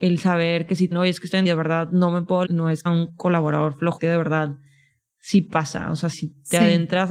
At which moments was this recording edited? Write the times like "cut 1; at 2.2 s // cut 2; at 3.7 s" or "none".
cut 1; at 0.9 s // cut 2; at 1.4 s // cut 3; at 2.4 s // cut 4; at 2.9 s // cut 5; at 4.0 s // cut 6; at 6.1 s